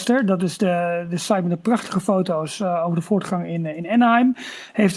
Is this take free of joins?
yes; 0 cuts

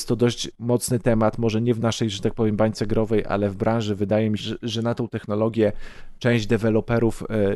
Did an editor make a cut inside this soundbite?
yes; 1 cut; at 4.4 s

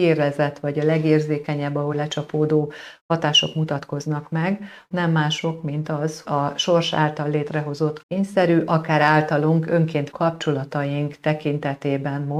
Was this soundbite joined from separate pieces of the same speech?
yes; 5 cuts; at 1.9 s, 4.9 s, 6.2 s, 8.0 s, 10.1 s

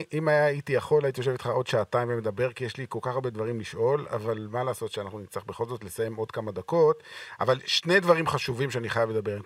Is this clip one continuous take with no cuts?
yes; 0 cuts

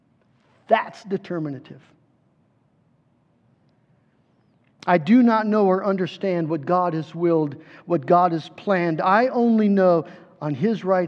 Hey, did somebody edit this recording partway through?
no; 0 cuts

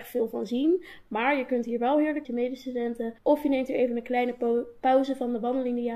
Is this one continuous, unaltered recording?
no; 2 cuts; at 2.2 s, 3.2 s

